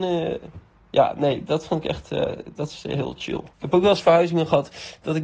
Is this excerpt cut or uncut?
cut